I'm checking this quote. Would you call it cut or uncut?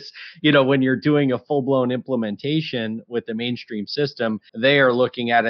cut